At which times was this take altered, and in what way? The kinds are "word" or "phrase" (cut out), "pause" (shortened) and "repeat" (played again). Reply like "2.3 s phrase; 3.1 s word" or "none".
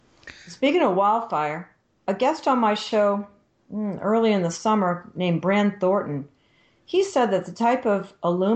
none